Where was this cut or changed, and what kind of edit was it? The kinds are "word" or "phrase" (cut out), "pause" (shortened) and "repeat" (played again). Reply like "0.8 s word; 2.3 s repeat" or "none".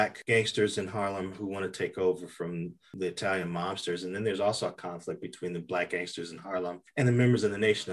none

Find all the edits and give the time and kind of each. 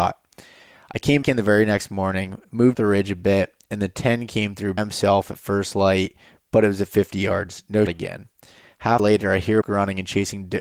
1.2 s word; 2.7 s word; 4.8 s word; 7.9 s word; 9.0 s word; 9.6 s word

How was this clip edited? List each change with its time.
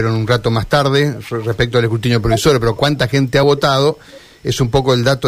none

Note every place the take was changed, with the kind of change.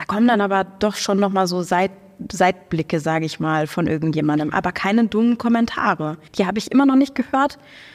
6.3 s pause

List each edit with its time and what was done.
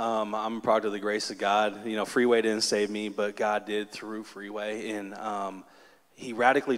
none

